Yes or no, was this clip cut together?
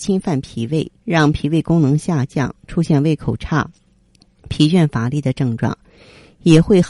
yes